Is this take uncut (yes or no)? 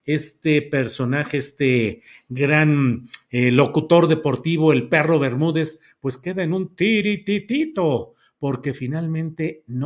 yes